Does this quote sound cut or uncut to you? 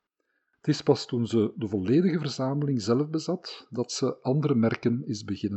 uncut